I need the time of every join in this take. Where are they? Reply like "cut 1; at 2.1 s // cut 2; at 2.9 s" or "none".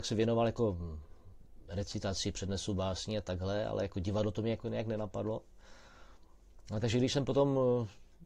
none